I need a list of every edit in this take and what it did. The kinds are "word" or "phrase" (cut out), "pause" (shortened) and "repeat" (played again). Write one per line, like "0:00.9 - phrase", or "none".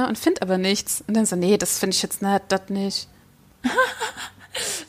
none